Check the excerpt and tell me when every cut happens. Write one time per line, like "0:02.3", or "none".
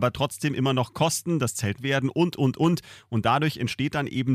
0:01.8